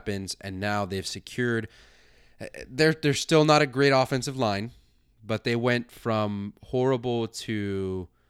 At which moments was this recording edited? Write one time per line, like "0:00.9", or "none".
none